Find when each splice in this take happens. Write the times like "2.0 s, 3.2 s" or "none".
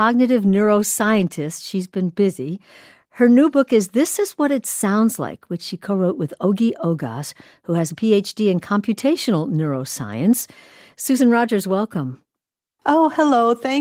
none